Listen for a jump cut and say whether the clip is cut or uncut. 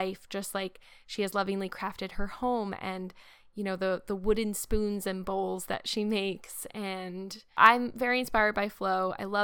uncut